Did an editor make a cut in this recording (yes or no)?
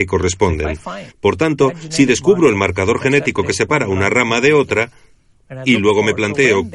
yes